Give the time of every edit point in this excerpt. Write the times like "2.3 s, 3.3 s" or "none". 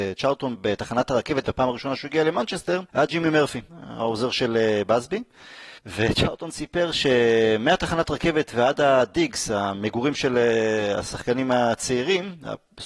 2.9 s, 3.7 s, 5.8 s